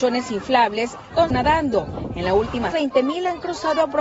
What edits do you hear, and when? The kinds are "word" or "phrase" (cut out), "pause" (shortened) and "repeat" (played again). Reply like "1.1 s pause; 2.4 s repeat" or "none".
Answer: 1.3 s phrase; 2.7 s phrase